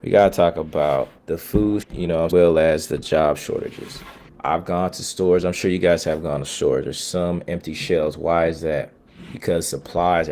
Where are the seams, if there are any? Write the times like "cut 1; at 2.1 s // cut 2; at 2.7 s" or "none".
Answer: cut 1; at 1.2 s // cut 2; at 1.8 s // cut 3; at 2.3 s // cut 4; at 4.3 s // cut 5; at 6.4 s